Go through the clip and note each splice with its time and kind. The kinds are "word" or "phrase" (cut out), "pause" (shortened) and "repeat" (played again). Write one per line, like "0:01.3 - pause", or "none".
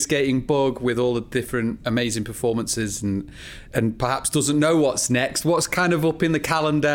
none

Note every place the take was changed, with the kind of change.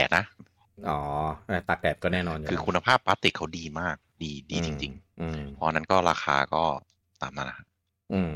0:05.1 - word

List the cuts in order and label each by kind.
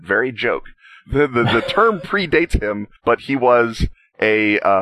0:03.0 - pause

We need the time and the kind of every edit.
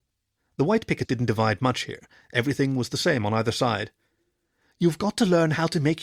0:01.0 - word

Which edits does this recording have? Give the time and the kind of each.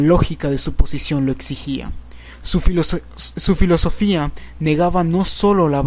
none

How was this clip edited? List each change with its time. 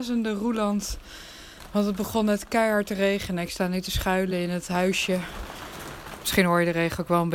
none

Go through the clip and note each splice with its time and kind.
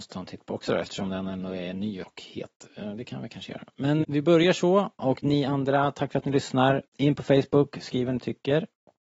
0:02.0 - word
0:04.0 - word
0:06.9 - pause

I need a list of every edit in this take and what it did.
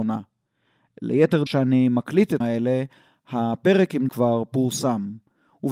0:01.5 - phrase
0:02.4 - word
0:04.1 - phrase

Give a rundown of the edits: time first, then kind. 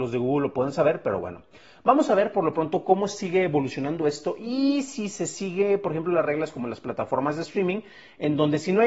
none

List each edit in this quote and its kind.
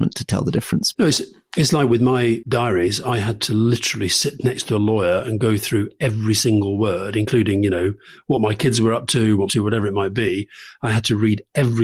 0:09.5 - phrase

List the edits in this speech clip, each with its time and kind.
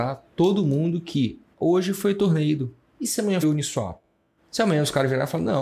0:03.4 - word

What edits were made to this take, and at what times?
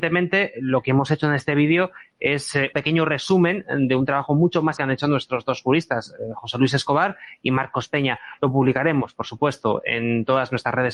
0:02.7 - word
0:04.8 - word

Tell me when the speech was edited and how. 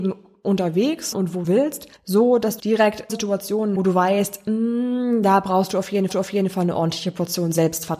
0:01.1 - word
0:01.4 - word
0:02.0 - pause
0:02.6 - word
0:03.1 - word
0:03.8 - phrase
0:06.1 - repeat

